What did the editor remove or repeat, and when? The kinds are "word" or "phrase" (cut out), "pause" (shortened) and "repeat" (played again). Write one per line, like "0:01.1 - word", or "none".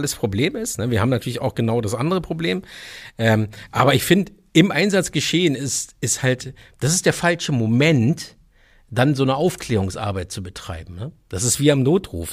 none